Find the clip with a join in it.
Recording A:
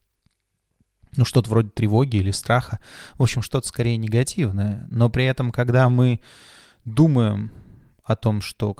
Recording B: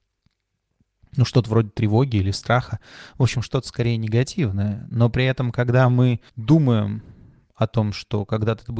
B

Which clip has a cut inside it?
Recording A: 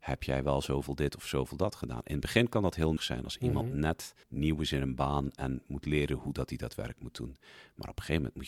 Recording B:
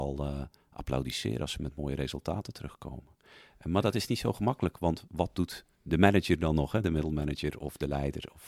A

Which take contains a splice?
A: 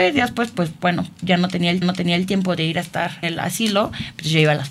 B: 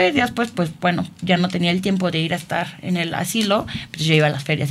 A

